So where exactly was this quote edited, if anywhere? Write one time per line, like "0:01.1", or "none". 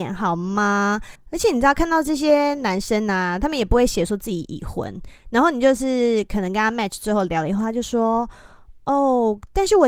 0:01.2